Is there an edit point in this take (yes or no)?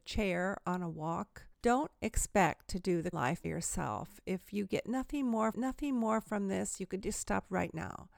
yes